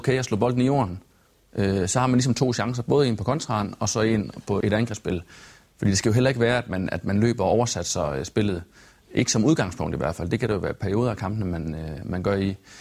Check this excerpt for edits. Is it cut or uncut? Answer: cut